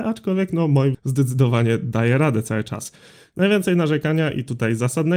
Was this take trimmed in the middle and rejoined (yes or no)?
yes